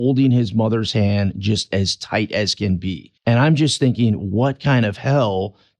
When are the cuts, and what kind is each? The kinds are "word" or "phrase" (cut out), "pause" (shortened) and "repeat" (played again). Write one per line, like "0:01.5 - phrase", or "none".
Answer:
0:03.2 - pause